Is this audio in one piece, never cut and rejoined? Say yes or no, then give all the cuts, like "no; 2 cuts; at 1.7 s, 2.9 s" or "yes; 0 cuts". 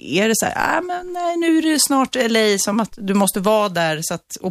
yes; 0 cuts